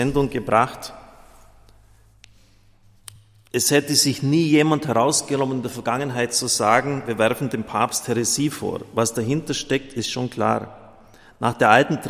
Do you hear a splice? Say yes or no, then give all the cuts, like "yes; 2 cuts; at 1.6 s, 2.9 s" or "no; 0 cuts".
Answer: no; 0 cuts